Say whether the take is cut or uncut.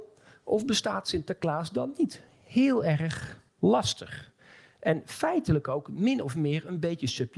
cut